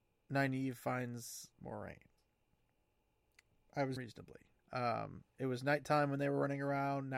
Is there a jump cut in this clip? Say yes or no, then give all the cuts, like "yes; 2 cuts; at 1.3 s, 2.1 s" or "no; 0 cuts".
yes; 3 cuts; at 1.5 s, 4.0 s, 4.6 s